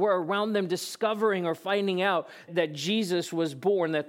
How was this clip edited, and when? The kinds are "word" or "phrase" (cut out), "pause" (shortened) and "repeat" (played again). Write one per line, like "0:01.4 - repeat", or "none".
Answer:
0:02.5 - word